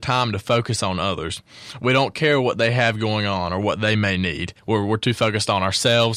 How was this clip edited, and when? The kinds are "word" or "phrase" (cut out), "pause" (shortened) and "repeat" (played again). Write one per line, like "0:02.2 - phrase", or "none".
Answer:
0:04.6 - pause